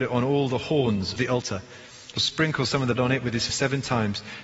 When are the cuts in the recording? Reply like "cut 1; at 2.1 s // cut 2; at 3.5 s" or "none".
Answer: cut 1; at 1.2 s // cut 2; at 2.2 s // cut 3; at 3.0 s // cut 4; at 3.5 s